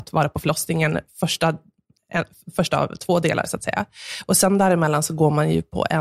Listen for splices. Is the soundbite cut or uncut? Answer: uncut